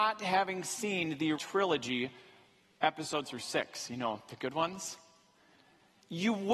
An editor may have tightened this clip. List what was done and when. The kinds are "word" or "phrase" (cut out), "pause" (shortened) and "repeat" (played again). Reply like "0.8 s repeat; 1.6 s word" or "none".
1.3 s word; 3.2 s word